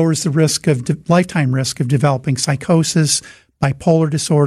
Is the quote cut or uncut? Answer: uncut